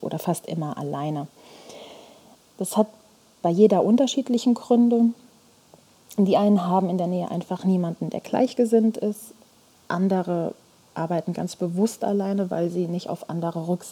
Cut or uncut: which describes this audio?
uncut